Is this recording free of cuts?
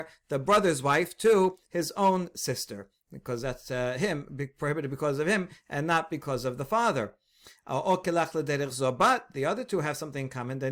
yes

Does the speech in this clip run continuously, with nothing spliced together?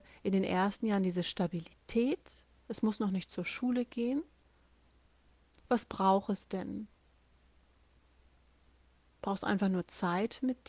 yes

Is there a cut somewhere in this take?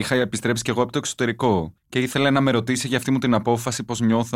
yes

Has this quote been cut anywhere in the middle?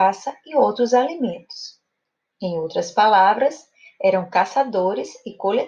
no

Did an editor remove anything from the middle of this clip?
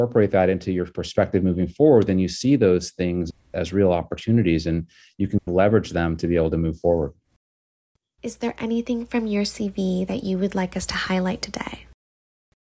no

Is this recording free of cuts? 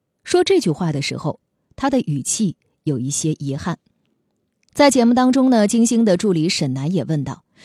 yes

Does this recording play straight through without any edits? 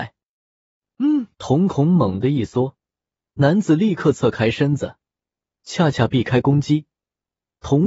no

